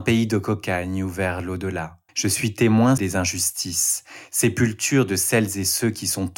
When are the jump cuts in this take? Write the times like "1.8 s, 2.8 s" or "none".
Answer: 2.1 s, 3.0 s